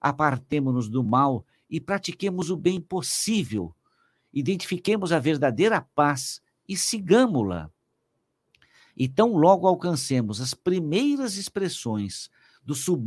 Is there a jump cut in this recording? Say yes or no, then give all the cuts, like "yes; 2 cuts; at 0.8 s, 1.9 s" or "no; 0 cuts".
no; 0 cuts